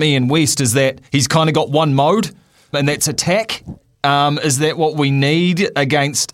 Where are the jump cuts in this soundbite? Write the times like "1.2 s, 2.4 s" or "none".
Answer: 1.1 s, 2.7 s